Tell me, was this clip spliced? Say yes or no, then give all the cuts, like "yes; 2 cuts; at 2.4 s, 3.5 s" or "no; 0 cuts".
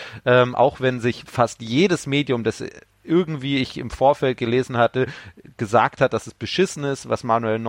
yes; 1 cut; at 1.3 s